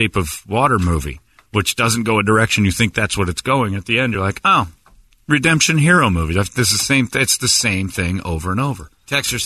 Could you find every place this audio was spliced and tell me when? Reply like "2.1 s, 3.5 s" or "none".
none